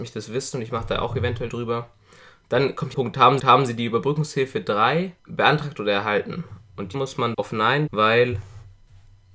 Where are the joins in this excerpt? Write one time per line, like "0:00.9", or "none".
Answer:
0:01.5
0:02.9
0:03.4
0:05.2
0:06.9
0:07.3
0:07.9

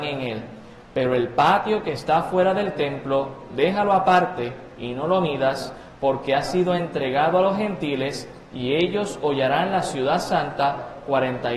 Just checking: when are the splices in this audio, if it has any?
none

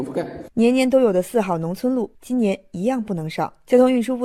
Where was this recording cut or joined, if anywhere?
0:02.2

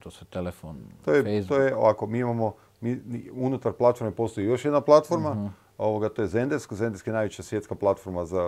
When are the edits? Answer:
none

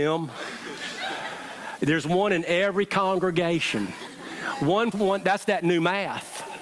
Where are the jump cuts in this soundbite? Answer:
0:04.9

